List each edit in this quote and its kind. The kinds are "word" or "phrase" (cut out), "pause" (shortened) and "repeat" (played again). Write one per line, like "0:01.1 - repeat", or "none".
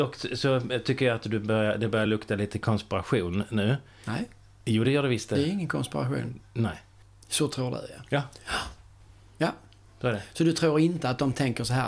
none